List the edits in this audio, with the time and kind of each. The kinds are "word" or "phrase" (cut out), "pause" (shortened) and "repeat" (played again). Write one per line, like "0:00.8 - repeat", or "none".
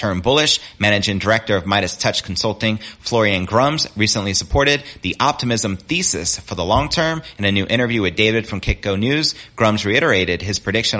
none